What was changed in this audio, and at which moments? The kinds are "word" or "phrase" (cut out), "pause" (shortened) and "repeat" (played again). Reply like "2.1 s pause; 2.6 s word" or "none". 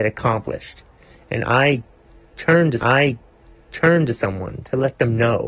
2.8 s repeat